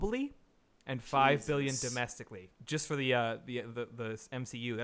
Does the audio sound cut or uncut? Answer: cut